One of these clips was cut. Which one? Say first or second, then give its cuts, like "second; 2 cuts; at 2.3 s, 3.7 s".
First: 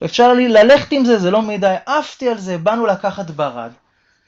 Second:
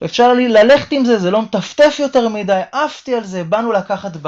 first; 1 cut; at 1.4 s